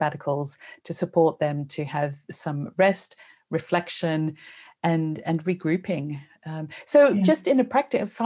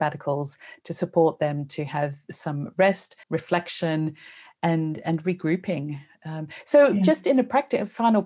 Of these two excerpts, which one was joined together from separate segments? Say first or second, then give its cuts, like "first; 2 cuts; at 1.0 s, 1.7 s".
second; 1 cut; at 3.2 s